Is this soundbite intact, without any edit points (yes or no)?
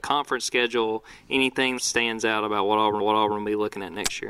no